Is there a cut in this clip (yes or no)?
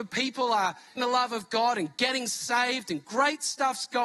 yes